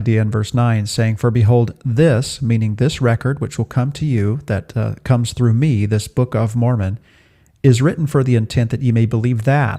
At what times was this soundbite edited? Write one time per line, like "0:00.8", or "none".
none